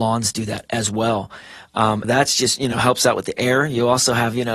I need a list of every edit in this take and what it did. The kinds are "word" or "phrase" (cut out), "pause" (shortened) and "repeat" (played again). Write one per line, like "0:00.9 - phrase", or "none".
0:02.0 - phrase